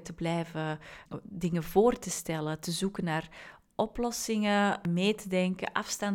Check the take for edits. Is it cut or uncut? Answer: uncut